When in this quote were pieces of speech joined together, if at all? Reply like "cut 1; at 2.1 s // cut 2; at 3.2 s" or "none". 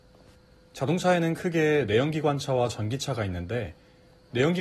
none